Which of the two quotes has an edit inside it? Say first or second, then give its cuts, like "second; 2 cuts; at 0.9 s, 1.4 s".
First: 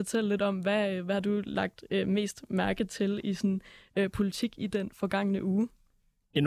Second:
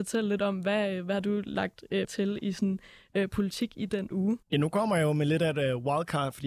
second; 3 cuts; at 2.0 s, 4.1 s, 4.4 s